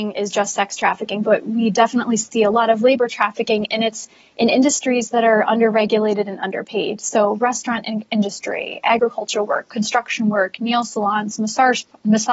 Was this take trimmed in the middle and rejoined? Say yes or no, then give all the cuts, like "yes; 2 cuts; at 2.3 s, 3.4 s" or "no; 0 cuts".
no; 0 cuts